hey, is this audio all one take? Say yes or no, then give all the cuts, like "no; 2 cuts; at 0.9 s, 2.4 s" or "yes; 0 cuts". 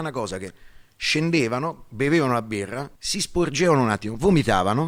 no; 1 cut; at 3.0 s